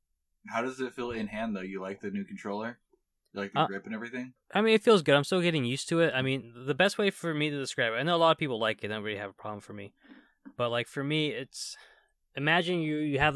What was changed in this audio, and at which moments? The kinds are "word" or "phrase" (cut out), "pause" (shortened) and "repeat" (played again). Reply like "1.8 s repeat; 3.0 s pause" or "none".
4.4 s pause